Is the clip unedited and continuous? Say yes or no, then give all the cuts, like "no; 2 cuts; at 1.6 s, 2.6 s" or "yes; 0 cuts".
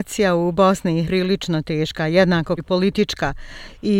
no; 2 cuts; at 1.0 s, 2.6 s